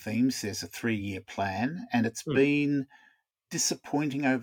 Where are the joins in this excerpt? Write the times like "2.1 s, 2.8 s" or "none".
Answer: none

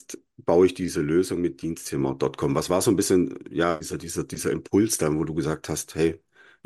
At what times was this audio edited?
none

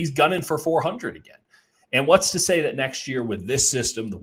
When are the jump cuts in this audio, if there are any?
none

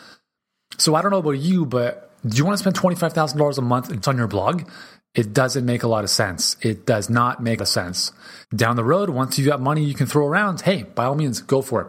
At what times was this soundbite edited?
4.0 s, 7.6 s, 8.4 s

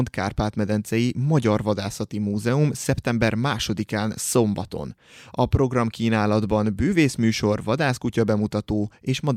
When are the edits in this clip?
none

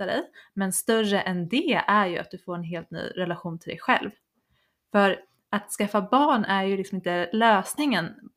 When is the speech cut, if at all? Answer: none

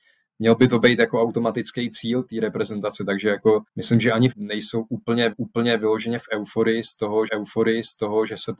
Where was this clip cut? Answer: 3.7 s, 4.3 s, 5.3 s, 7.3 s

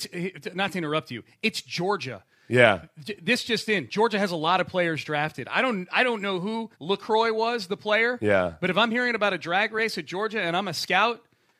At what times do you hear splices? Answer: 6.7 s

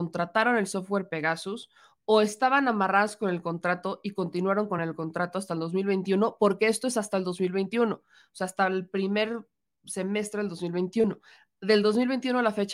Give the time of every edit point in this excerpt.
none

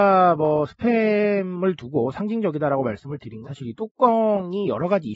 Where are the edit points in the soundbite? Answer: 3.4 s

